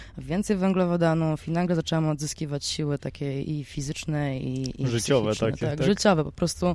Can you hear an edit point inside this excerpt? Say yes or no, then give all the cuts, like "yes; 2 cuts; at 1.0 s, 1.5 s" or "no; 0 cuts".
no; 0 cuts